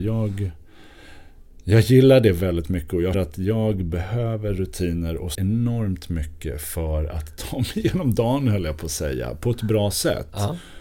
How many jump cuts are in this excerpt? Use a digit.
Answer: 2